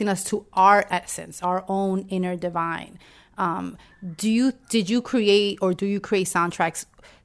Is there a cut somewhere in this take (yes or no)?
no